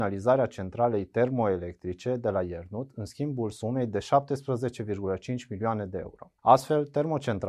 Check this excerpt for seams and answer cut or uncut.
cut